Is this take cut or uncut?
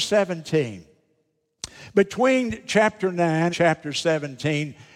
cut